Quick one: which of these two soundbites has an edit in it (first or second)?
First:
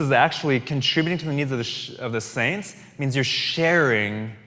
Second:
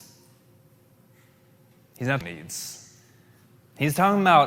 second